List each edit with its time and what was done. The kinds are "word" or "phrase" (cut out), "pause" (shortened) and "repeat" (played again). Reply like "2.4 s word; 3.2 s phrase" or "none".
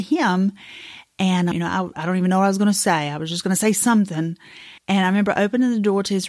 1.5 s word; 4.8 s pause